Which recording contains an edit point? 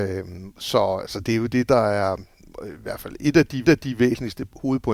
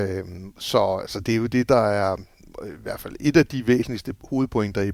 first; 1 cut; at 3.6 s

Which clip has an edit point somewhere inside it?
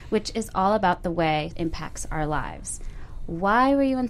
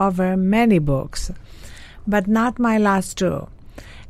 first; 1 cut; at 1.5 s

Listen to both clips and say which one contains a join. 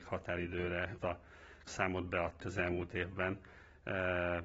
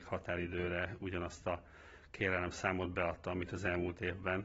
first; 3 cuts; at 1.0 s, 1.7 s, 2.4 s

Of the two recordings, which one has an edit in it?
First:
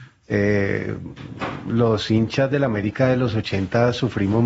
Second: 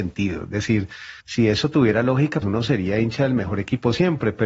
second; 2 cuts; at 1.2 s, 2.4 s

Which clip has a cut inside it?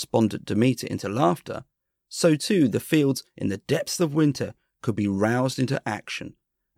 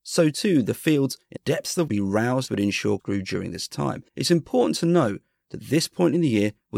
second; 5 cuts; at 1.4 s, 1.9 s, 2.5 s, 3.0 s, 4.1 s

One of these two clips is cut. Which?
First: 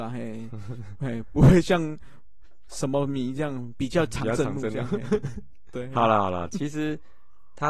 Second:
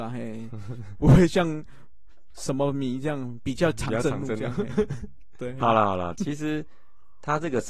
second; 1 cut; at 1.0 s

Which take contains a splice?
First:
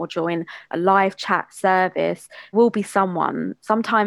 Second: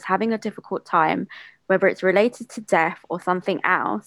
first; 1 cut; at 2.5 s

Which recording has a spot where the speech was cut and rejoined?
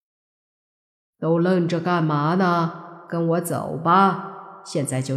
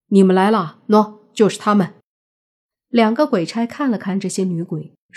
second; 1 cut; at 2.1 s

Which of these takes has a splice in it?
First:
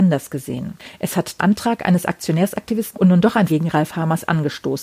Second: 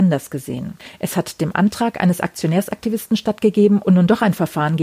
first; 3 cuts; at 1.4 s, 2.9 s, 3.5 s

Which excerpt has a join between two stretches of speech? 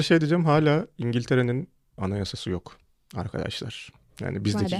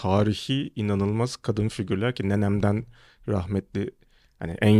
first; 1 cut; at 2.0 s

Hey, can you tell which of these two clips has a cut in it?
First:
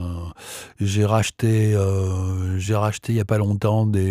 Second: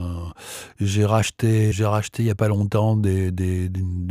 second; 1 cut; at 1.7 s

